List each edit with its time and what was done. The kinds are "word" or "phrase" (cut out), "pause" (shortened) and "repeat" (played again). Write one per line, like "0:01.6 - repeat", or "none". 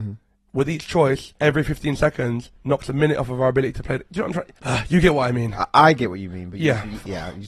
0:01.4 - pause
0:02.5 - pause
0:04.6 - pause